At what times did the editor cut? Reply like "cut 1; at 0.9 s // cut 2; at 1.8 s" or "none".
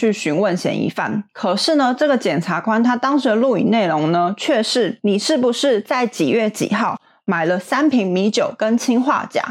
none